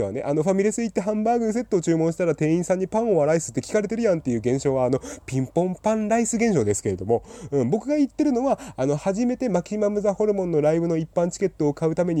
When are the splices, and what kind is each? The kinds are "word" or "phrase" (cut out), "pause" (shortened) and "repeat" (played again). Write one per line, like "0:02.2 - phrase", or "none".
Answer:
none